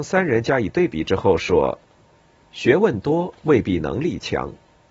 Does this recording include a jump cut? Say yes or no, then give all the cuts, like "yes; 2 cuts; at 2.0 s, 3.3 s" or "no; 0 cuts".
no; 0 cuts